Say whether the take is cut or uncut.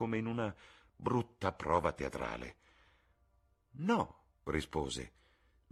cut